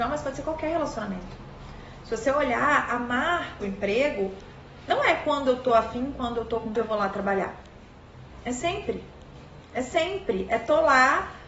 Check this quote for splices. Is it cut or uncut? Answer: cut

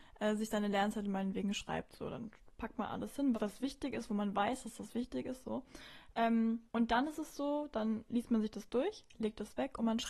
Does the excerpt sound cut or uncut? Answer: cut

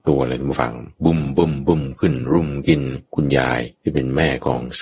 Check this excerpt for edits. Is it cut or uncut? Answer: cut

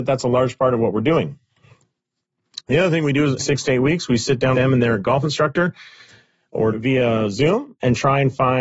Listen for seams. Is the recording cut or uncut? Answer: cut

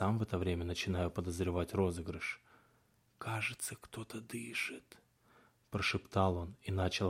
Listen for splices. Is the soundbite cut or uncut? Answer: uncut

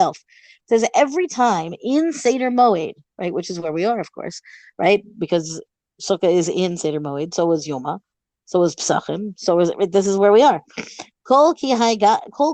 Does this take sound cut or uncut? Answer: uncut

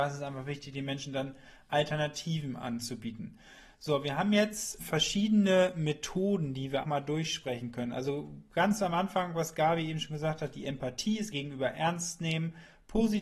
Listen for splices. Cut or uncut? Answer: cut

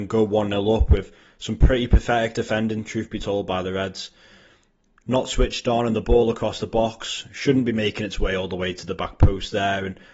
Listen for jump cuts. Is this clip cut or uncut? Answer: uncut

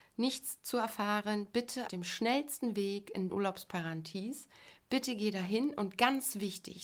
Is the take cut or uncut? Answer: cut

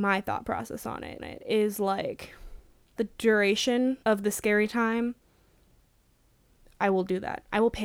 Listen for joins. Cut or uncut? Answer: cut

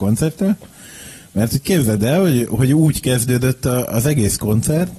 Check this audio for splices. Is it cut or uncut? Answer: uncut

